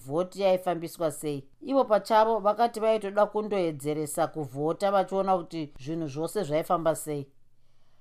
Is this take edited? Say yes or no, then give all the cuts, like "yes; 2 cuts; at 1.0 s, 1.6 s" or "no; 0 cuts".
yes; 1 cut; at 1.5 s